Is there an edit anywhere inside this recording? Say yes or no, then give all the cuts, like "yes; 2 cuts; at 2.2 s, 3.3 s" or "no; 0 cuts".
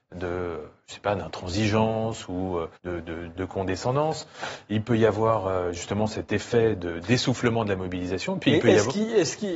yes; 2 cuts; at 2.8 s, 3.4 s